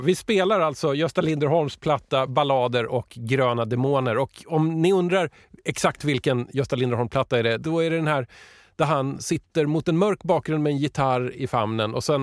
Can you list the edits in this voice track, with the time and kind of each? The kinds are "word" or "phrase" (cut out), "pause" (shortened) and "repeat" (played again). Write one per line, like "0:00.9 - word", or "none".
0:02.3 - word